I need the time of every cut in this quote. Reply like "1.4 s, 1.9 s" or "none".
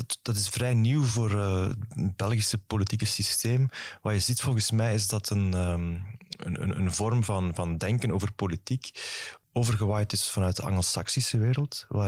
none